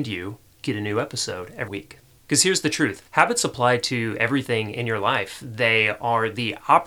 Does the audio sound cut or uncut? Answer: cut